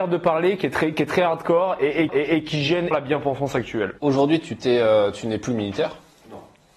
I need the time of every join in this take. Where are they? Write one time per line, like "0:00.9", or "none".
0:02.1
0:02.9
0:04.0